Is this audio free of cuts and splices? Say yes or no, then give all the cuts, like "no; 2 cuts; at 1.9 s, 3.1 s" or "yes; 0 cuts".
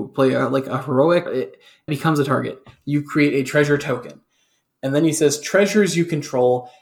no; 2 cuts; at 1.3 s, 1.9 s